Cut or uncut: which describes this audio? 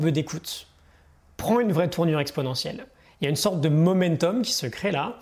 uncut